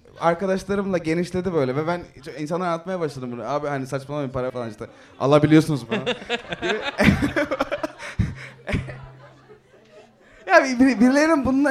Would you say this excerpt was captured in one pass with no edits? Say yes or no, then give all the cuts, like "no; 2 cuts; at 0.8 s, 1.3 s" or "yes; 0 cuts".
no; 2 cuts; at 4.5 s, 5.9 s